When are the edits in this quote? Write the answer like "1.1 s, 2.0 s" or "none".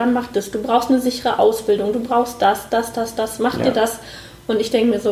none